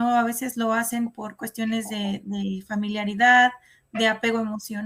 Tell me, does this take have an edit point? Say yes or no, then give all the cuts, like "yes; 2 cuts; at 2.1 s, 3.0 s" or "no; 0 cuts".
no; 0 cuts